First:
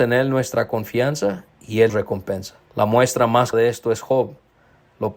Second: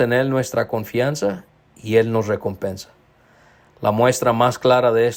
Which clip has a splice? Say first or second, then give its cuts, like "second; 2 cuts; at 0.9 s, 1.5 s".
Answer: first; 4 cuts; at 1.5 s, 1.9 s, 2.6 s, 3.5 s